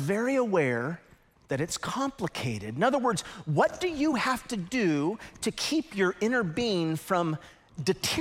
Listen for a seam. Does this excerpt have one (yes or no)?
no